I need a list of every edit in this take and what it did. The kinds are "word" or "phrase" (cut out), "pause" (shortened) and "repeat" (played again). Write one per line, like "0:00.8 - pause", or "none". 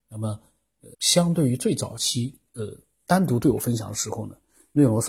0:00.9 - pause
0:02.5 - pause

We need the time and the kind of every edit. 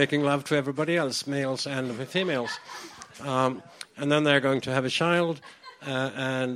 none

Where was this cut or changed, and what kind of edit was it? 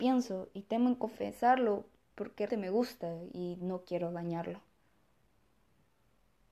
0:02.5 - word

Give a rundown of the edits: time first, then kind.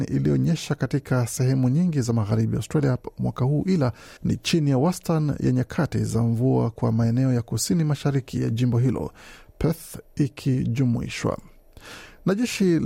0:04.2 - pause

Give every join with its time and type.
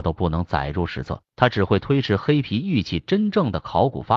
0:01.3 - pause

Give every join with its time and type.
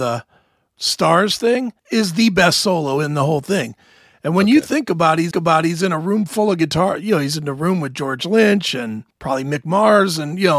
0:01.8 - pause
0:05.3 - repeat
0:09.1 - pause

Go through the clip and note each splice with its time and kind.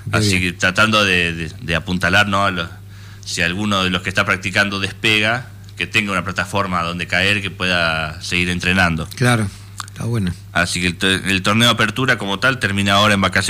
none

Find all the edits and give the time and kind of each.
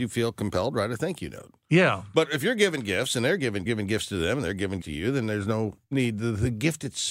0:03.7 - phrase
0:04.8 - word
0:05.8 - pause

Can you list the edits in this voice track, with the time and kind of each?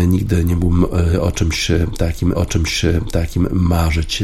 0:02.3 - repeat

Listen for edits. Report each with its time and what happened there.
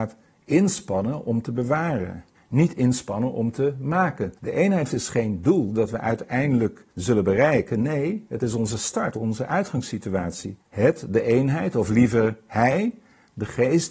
0:02.3 - pause
0:04.4 - pause
0:04.9 - phrase
0:06.9 - pause
0:10.6 - pause

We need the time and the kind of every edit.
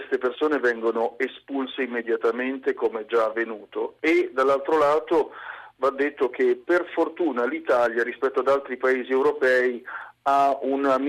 none

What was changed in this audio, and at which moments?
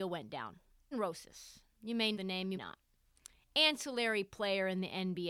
0:00.9 - word
0:02.1 - word
0:02.6 - word

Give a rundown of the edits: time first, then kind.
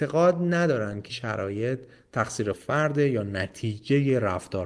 0:01.1 - word
0:02.5 - word

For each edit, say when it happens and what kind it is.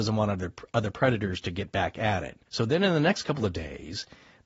0:02.5 - pause

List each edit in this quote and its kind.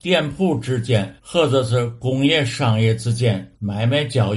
0:01.2 - pause

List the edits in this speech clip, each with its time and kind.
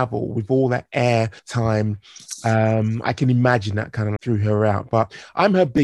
0:01.4 - pause
0:04.2 - word

